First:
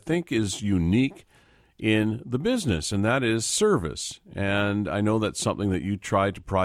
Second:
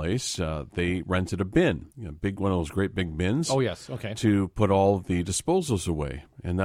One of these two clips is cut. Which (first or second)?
second